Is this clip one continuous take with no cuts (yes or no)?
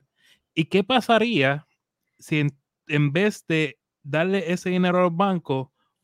yes